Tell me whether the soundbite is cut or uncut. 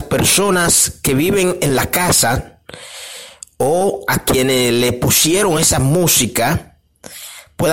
uncut